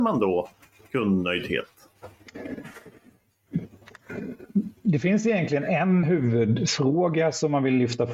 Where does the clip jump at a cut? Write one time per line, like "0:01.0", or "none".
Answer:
0:06.0